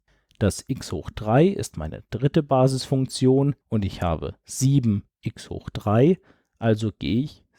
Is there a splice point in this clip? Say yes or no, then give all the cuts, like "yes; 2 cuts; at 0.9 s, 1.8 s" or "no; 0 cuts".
yes; 1 cut; at 3.6 s